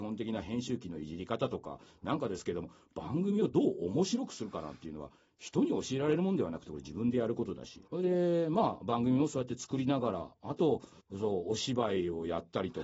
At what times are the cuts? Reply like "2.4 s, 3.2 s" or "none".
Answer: 7.9 s, 11.0 s